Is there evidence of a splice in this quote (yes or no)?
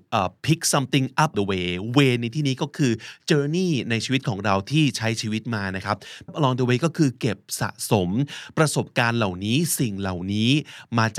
yes